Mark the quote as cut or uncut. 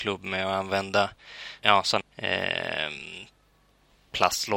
cut